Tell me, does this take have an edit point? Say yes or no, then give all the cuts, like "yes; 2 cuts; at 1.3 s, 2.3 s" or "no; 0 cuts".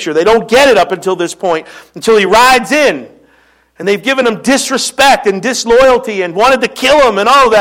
no; 0 cuts